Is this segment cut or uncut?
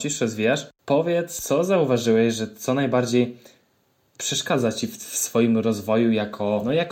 uncut